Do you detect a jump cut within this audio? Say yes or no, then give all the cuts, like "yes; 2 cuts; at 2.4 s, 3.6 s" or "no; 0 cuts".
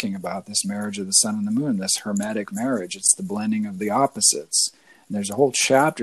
no; 0 cuts